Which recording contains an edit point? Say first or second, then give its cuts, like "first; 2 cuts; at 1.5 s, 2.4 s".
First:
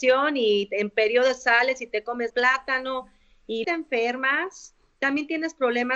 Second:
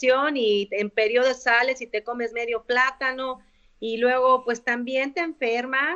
first; 2 cuts; at 2.3 s, 3.6 s